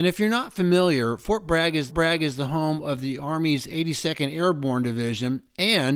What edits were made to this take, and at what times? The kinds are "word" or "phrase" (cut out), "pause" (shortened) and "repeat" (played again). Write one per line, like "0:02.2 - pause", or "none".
0:01.9 - repeat